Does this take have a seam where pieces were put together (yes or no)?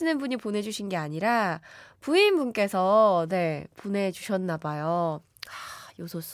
no